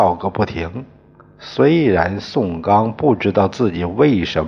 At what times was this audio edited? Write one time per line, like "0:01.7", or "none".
none